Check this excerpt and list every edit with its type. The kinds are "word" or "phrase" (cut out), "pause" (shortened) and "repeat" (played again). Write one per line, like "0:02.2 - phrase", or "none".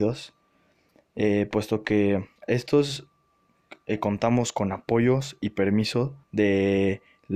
0:02.4 - pause
0:06.2 - pause

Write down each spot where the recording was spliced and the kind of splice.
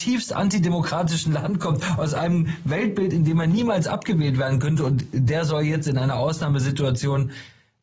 none

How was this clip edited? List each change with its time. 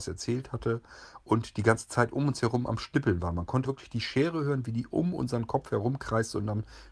0:03.7 - word

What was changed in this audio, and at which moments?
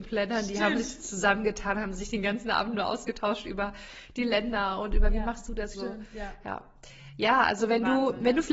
0:05.7 - phrase

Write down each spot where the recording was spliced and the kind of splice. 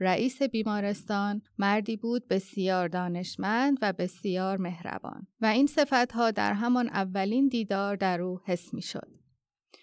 0:01.5 - pause
0:05.3 - pause

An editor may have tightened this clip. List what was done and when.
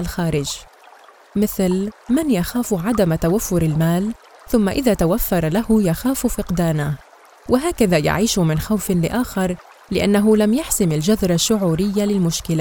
none

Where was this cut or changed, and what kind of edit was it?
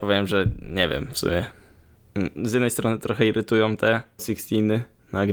0:04.2 - word

